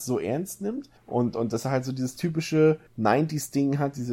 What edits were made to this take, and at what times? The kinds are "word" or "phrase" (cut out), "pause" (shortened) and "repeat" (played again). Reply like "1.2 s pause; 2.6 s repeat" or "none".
1.0 s pause; 2.9 s pause